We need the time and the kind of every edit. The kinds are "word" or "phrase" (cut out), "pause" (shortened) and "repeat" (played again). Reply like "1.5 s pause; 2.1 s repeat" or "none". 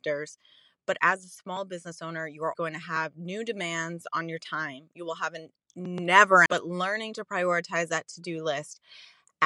2.5 s word; 6.5 s phrase